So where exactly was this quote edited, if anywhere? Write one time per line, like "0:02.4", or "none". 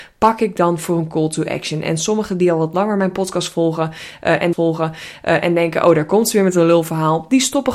0:04.5